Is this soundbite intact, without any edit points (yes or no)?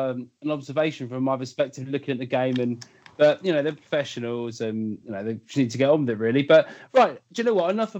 yes